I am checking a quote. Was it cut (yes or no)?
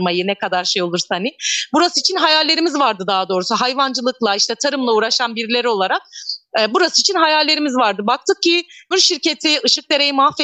yes